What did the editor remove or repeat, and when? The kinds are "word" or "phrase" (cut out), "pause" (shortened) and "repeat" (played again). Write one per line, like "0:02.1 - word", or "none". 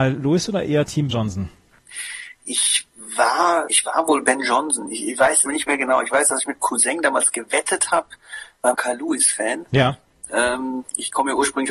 0:01.1 - word
0:03.7 - word
0:05.5 - phrase
0:06.6 - word
0:08.7 - phrase